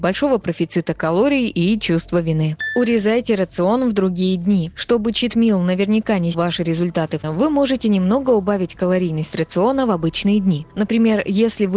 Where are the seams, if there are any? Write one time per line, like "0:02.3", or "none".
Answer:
0:06.3
0:07.2